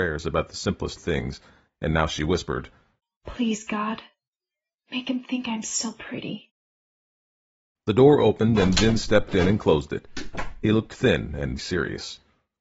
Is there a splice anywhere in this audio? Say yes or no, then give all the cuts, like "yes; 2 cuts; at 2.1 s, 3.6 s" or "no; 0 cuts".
yes; 2 cuts; at 1.0 s, 11.6 s